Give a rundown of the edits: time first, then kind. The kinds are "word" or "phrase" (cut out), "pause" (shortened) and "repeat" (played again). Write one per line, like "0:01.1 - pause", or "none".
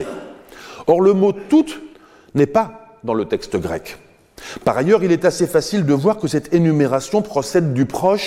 0:01.9 - pause